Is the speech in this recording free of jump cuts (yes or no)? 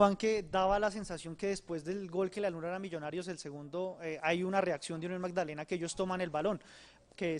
yes